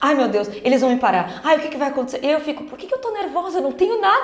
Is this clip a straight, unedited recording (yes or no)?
yes